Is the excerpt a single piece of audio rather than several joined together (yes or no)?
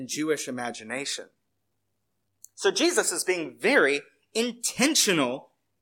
yes